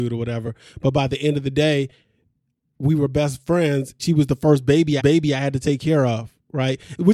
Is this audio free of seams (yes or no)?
no